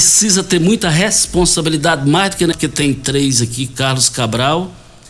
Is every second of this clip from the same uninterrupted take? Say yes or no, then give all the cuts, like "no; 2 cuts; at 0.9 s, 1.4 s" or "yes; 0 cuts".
no; 1 cut; at 2.5 s